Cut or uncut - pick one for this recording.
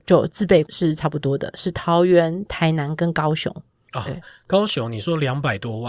uncut